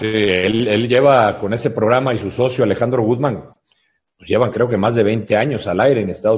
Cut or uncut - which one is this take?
uncut